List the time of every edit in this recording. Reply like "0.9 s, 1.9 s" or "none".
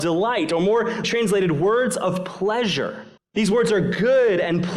1.0 s, 3.2 s